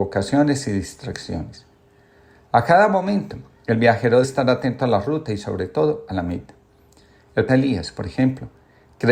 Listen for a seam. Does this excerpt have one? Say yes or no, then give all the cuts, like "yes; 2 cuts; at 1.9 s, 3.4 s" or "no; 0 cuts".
yes; 2 cuts; at 4.2 s, 7.5 s